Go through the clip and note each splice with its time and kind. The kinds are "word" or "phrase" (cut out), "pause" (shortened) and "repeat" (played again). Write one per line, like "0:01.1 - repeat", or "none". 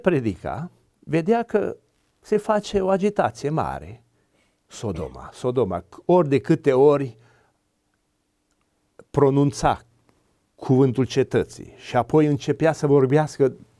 none